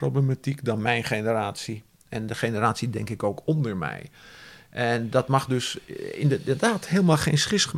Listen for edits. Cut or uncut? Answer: uncut